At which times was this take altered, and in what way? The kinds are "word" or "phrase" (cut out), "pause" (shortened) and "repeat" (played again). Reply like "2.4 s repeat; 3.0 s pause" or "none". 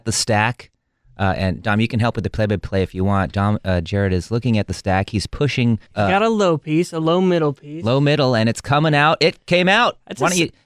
5.9 s pause